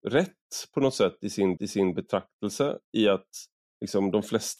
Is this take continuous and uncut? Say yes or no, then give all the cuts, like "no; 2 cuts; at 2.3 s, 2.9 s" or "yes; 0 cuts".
no; 2 cuts; at 1.6 s, 3.5 s